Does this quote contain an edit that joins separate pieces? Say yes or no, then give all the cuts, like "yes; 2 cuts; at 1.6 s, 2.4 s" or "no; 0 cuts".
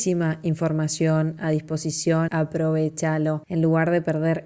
yes; 1 cut; at 2.3 s